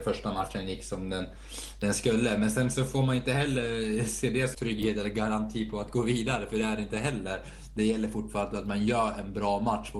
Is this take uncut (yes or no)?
no